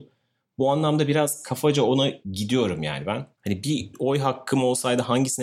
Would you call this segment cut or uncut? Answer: cut